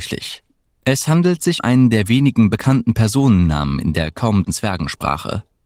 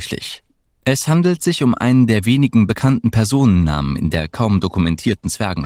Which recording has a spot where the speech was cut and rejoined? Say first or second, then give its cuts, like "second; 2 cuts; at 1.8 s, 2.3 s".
first; 2 cuts; at 1.6 s, 4.4 s